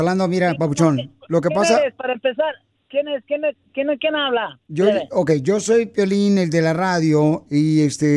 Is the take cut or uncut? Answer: uncut